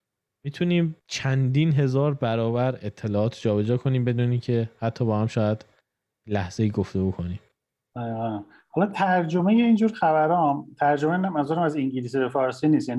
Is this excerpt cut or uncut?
cut